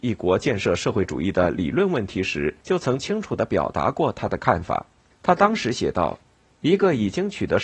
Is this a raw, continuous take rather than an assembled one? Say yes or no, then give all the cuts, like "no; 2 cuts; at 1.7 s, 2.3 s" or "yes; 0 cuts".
no; 3 cuts; at 2.6 s, 5.1 s, 6.2 s